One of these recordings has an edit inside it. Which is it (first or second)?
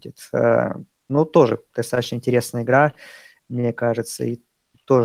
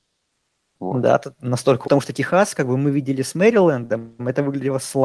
second